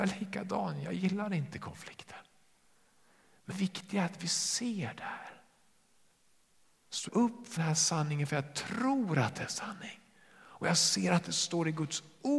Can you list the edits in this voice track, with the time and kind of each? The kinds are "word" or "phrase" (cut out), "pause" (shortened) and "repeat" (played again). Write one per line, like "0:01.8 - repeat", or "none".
0:03.5 - word
0:07.1 - word
0:07.6 - word